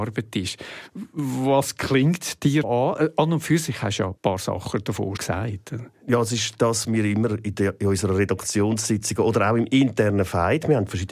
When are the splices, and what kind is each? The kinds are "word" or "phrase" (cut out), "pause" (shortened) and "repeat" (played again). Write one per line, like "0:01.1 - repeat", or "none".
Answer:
0:02.6 - word
0:04.2 - pause
0:05.2 - word
0:06.8 - word